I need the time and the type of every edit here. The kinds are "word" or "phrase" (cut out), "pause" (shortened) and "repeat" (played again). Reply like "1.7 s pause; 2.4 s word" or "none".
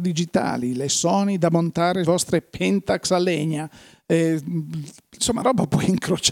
2.0 s word; 5.4 s word

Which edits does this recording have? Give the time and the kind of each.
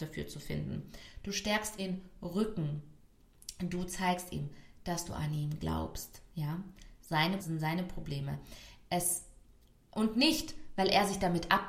1.8 s word; 7.4 s word

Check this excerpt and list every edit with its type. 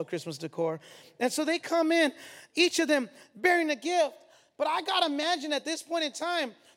none

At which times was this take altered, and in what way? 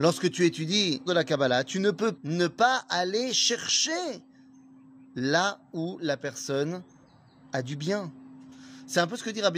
1.1 s word; 2.1 s word

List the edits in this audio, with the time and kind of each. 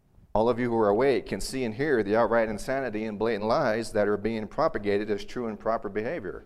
none

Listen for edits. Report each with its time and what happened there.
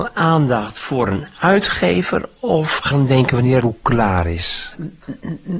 2.9 s phrase; 3.6 s word

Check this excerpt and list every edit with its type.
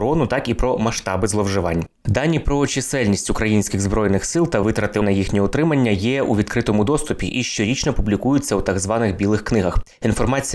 none

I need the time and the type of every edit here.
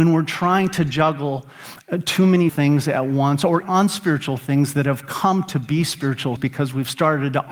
2.5 s word; 3.6 s word; 6.4 s word

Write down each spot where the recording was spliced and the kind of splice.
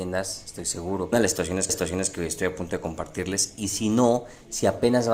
1.1 s phrase; 1.7 s repeat

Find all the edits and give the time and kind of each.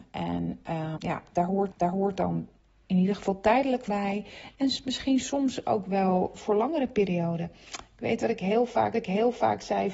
1.0 s word; 1.7 s repeat; 3.9 s word; 6.4 s word; 8.9 s repeat

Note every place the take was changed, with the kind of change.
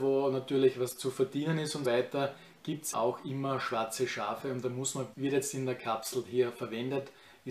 1.8 s word; 2.9 s word; 5.1 s phrase

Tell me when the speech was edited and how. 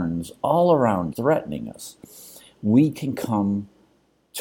1.1 s word

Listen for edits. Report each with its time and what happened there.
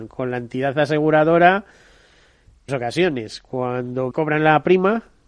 2.7 s word; 4.1 s word

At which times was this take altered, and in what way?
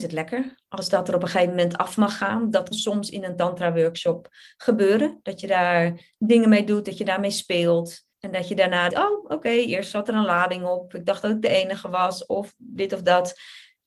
2.7 s word; 8.1 s pause; 8.9 s word

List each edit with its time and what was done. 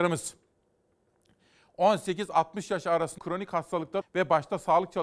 3.2 s word; 4.0 s word

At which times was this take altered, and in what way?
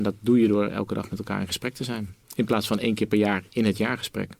2.2 s pause

